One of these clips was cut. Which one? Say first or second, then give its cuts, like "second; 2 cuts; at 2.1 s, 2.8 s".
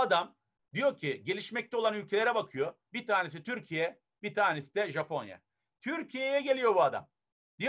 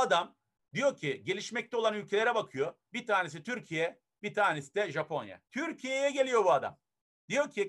second; 1 cut; at 5.5 s